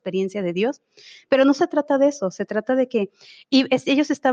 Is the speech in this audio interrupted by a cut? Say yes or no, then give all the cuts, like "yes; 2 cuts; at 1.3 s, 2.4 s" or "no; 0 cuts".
no; 0 cuts